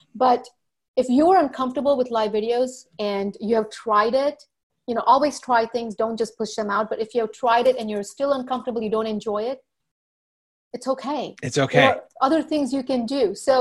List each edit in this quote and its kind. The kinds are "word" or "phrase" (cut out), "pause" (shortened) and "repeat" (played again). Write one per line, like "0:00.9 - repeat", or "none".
none